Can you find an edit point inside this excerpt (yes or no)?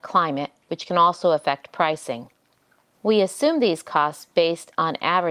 no